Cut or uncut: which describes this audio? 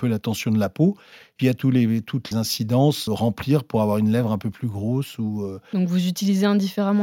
cut